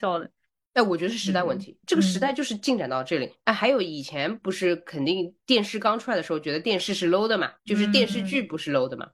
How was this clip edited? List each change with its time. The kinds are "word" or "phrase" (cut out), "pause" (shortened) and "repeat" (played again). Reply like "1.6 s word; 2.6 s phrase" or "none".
5.4 s pause; 7.6 s pause